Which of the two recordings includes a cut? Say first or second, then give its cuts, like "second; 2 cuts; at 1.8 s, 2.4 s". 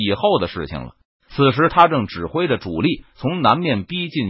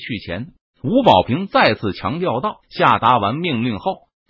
second; 1 cut; at 2.6 s